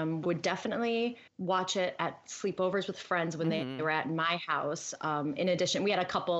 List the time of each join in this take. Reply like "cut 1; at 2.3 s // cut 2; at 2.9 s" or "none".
cut 1; at 1.3 s